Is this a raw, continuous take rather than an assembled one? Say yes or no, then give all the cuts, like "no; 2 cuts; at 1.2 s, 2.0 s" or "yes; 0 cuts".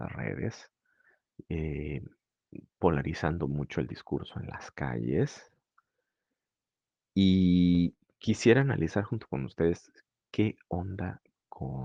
yes; 0 cuts